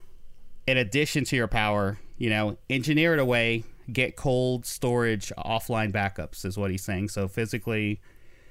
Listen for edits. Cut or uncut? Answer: uncut